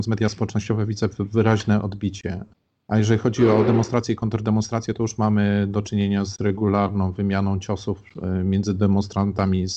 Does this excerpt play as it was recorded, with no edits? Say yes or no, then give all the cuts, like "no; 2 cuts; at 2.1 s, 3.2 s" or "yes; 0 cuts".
yes; 0 cuts